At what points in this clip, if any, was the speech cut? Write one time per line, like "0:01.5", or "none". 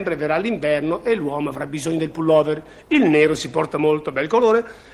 none